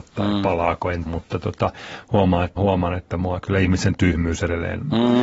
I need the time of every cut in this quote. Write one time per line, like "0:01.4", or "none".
0:01.1
0:02.6